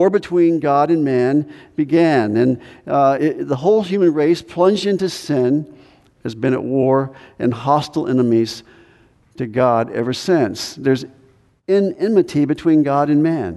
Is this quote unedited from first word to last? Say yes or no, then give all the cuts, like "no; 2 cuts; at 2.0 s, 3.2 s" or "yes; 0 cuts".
no; 2 cuts; at 3.2 s, 6.2 s